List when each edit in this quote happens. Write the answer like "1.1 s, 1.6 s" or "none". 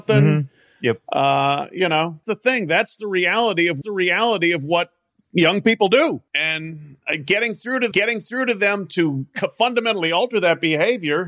2.2 s, 3.8 s, 6.3 s, 7.9 s